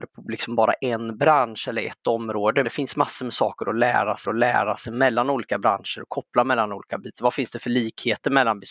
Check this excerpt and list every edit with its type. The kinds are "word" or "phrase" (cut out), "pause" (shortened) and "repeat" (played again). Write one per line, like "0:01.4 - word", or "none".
0:02.6 - word
0:04.2 - repeat